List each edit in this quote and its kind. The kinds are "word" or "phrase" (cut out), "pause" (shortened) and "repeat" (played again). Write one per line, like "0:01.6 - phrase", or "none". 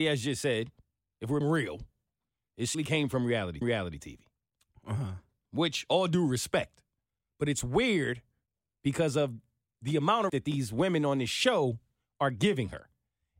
0:01.4 - word
0:02.7 - word
0:03.6 - repeat
0:10.3 - phrase